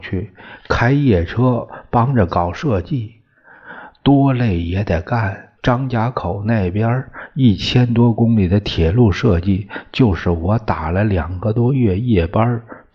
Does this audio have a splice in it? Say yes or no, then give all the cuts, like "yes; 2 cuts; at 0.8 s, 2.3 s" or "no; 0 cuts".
yes; 1 cut; at 5.5 s